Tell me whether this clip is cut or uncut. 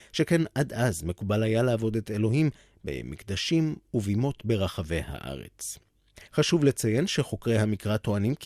cut